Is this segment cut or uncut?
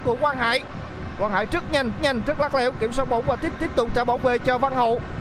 cut